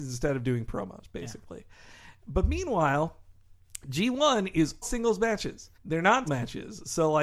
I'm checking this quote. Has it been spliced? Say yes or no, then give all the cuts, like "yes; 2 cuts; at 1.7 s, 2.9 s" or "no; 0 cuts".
yes; 3 cuts; at 4.8 s, 5.7 s, 6.3 s